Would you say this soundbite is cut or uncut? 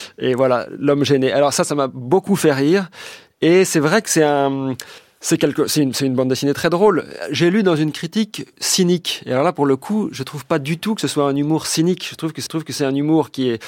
cut